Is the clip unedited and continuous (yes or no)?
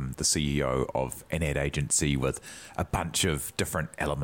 yes